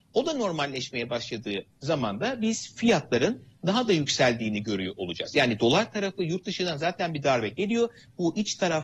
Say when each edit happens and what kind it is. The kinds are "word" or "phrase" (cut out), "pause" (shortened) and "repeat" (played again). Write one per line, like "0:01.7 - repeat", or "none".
none